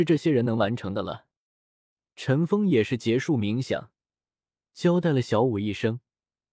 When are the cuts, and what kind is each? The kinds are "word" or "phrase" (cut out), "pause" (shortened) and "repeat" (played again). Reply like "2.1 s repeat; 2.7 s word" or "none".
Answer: none